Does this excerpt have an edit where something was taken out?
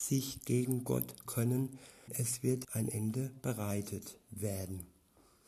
yes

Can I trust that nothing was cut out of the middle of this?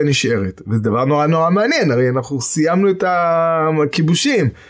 yes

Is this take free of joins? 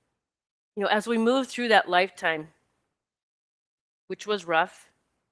yes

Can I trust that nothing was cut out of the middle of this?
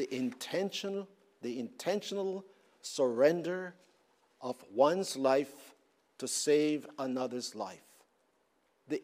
yes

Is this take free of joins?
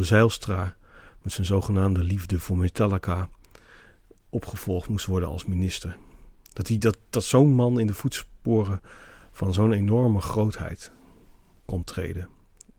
yes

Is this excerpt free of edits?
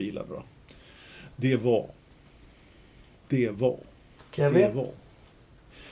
yes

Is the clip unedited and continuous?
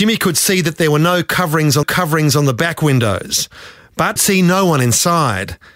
no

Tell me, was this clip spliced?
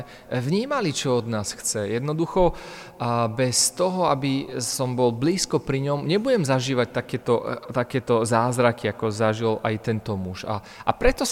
no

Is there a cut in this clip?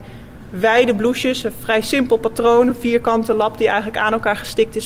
no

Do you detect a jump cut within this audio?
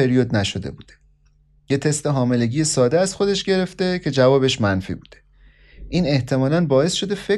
no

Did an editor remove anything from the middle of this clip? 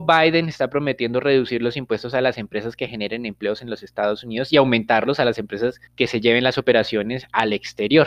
yes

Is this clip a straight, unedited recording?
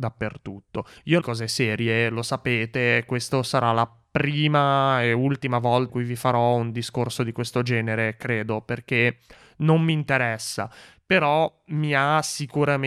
no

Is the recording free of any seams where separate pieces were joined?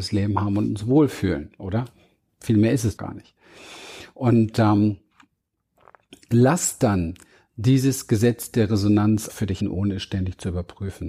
no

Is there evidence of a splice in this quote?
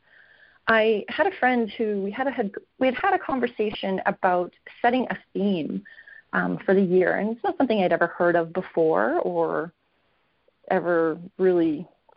no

